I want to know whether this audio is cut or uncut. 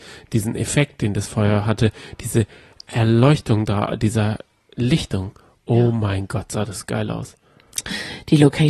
uncut